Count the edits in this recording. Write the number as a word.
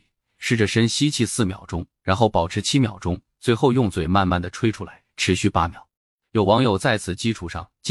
one